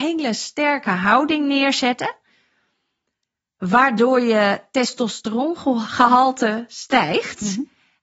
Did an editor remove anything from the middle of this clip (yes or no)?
no